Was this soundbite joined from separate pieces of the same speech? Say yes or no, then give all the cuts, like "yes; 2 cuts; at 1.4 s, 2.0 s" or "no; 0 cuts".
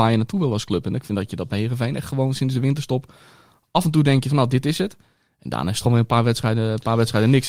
no; 0 cuts